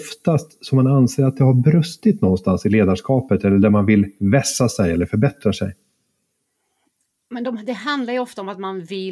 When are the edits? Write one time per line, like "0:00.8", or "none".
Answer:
none